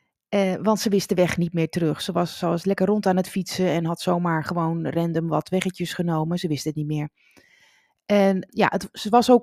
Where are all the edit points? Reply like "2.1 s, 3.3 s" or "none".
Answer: 8.5 s